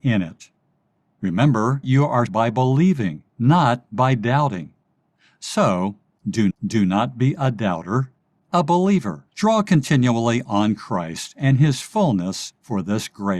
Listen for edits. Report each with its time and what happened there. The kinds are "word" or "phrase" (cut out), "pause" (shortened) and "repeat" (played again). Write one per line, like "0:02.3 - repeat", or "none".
0:01.8 - word
0:02.3 - word
0:03.3 - pause
0:06.5 - repeat
0:08.3 - word
0:09.3 - pause